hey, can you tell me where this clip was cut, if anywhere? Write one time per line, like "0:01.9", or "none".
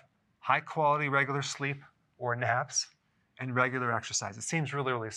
none